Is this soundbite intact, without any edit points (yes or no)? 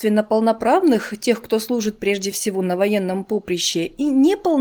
yes